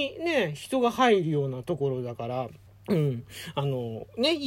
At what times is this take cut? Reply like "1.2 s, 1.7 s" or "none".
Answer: 2.7 s